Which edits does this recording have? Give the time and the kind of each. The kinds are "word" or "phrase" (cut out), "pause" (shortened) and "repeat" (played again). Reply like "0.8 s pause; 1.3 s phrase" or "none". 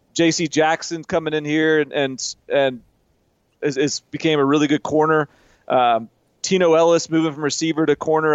2.4 s pause; 4.1 s pause